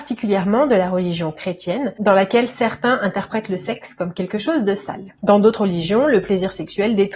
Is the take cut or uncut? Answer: uncut